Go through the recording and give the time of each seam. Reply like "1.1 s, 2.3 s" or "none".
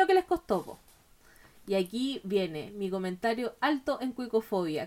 none